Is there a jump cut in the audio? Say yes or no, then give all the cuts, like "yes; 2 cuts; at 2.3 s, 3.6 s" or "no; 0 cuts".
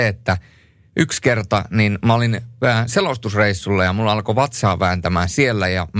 no; 0 cuts